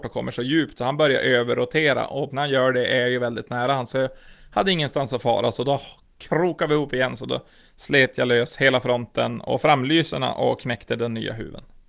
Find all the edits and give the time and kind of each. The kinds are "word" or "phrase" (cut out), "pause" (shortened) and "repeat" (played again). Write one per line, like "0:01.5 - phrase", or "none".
0:02.3 - word